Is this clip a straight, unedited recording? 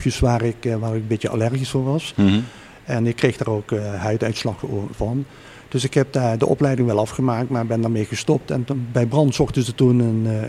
yes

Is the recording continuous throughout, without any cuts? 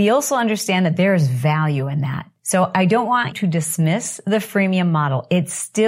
no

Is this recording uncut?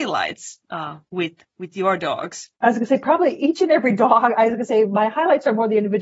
no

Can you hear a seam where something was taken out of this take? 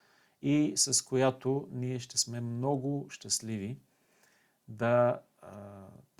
no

